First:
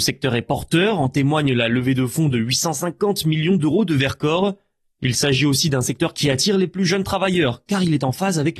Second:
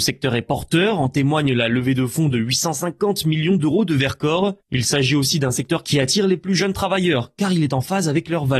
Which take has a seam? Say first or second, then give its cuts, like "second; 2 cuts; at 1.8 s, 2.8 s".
second; 1 cut; at 4.6 s